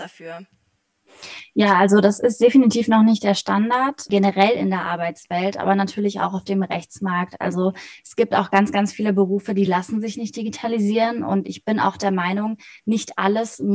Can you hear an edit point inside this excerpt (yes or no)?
no